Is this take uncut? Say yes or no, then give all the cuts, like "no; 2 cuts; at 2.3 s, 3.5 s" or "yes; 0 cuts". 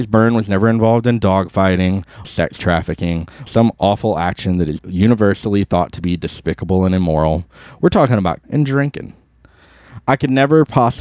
no; 4 cuts; at 2.2 s, 3.5 s, 4.8 s, 8.4 s